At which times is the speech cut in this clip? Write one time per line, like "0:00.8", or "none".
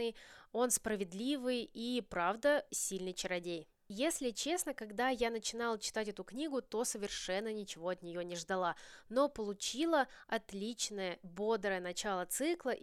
0:02.7